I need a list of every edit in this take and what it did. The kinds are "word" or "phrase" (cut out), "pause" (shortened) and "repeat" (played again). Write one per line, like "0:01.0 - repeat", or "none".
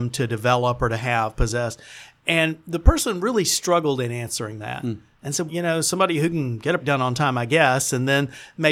0:05.5 - word
0:06.8 - word